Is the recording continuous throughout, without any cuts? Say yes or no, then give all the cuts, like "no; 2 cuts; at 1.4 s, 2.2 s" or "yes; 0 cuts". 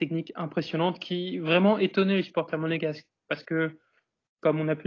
yes; 0 cuts